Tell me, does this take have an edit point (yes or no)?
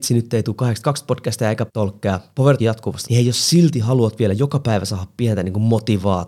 yes